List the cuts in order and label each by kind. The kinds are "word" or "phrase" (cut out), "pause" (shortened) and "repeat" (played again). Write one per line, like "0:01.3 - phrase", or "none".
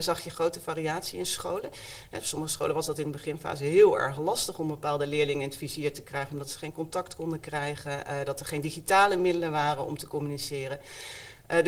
none